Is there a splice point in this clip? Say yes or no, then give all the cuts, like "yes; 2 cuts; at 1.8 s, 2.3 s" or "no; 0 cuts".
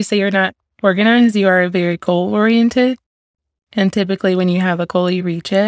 no; 0 cuts